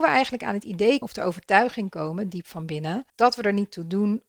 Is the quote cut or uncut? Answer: cut